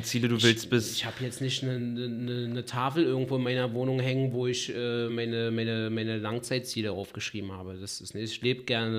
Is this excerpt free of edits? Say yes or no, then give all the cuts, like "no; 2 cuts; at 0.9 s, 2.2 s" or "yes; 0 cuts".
yes; 0 cuts